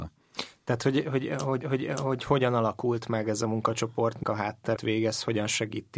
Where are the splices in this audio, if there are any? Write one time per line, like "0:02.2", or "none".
0:01.6
0:04.2
0:04.8